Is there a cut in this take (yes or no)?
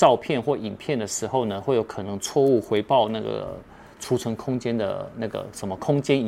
no